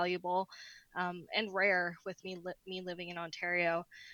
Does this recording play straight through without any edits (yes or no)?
yes